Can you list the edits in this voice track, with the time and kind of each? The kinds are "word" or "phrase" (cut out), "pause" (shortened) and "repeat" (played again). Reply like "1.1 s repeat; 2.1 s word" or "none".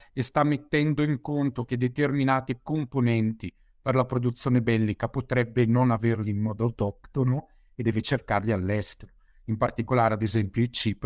none